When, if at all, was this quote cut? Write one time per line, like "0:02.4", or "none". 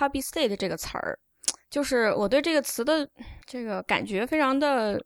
0:03.4